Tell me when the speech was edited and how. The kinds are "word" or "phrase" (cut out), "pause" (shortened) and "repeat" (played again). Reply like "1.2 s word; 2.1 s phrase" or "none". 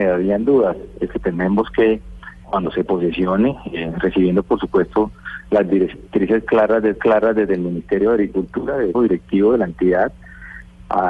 1.1 s word; 2.4 s phrase; 6.9 s repeat; 8.9 s word